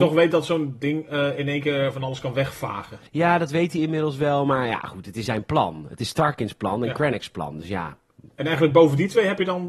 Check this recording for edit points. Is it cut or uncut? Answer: cut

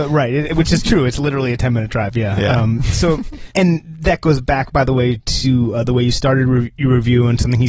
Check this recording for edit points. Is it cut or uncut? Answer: uncut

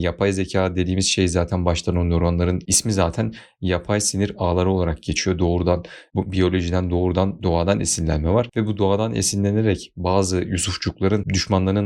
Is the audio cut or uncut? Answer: uncut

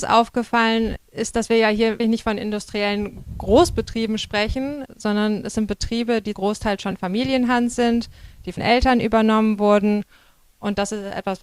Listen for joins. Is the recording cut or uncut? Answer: cut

